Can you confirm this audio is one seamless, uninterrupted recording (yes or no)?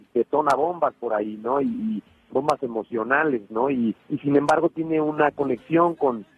no